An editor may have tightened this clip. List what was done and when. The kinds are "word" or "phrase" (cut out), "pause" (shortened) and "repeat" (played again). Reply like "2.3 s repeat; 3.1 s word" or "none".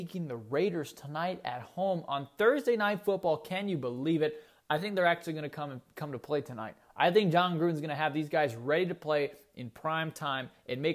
none